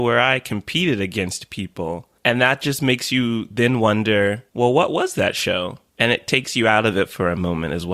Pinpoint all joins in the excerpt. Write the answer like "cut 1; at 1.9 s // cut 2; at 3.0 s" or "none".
cut 1; at 4.5 s